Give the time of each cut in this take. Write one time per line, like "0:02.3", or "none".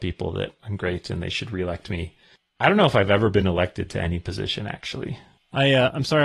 none